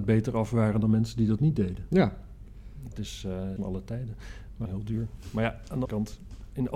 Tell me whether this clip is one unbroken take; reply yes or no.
no